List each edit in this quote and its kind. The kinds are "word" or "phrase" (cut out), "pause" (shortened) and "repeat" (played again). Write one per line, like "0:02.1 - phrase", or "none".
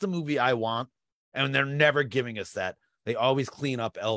none